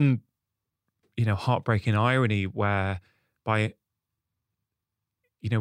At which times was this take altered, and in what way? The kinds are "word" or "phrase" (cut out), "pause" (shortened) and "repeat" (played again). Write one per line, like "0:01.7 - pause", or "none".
none